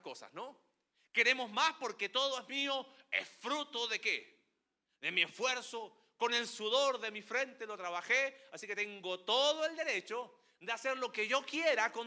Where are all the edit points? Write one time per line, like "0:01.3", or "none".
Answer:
none